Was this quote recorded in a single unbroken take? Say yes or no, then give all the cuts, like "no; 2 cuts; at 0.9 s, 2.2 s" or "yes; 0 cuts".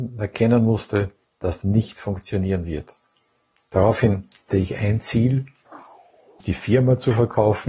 no; 3 cuts; at 1.6 s, 4.5 s, 6.4 s